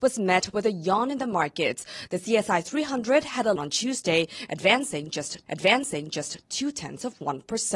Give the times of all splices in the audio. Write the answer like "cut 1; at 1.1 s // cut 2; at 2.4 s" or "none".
cut 1; at 3.6 s // cut 2; at 5.5 s